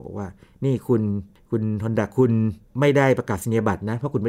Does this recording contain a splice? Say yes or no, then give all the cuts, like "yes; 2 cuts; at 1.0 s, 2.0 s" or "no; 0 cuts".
no; 0 cuts